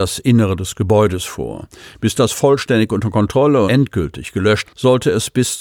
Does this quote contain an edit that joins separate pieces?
yes; 3 cuts; at 2.3 s, 3.7 s, 4.6 s

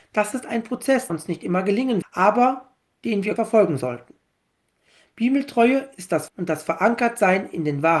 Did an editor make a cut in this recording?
yes; 4 cuts; at 1.1 s, 2.0 s, 3.4 s, 6.3 s

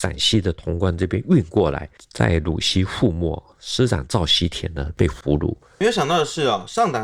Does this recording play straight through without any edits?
yes; 0 cuts

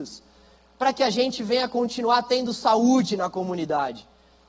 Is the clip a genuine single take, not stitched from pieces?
yes; 0 cuts

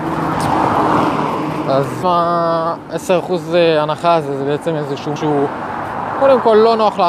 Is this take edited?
yes; 2 cuts; at 2.0 s, 5.2 s

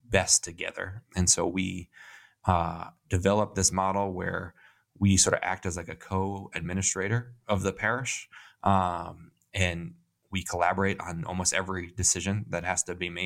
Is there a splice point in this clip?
no; 0 cuts

